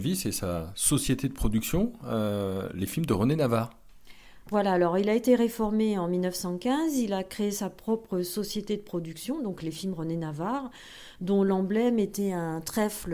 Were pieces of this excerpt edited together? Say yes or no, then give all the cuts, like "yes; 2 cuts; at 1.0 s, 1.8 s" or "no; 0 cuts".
no; 0 cuts